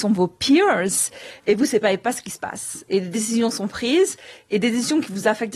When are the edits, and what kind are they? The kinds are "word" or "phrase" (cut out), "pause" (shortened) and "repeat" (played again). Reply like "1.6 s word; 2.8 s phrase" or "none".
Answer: none